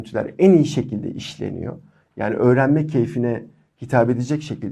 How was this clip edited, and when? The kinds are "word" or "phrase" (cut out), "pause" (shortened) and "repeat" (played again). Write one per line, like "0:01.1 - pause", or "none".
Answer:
none